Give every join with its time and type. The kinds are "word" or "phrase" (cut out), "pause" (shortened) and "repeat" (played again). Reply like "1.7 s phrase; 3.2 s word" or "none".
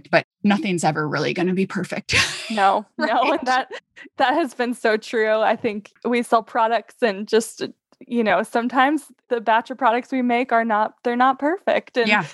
none